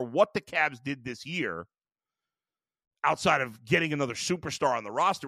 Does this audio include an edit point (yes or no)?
no